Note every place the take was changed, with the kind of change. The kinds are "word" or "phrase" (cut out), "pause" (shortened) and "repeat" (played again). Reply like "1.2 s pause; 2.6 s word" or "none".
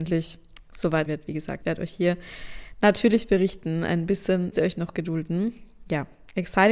1.1 s word; 1.6 s word; 4.5 s word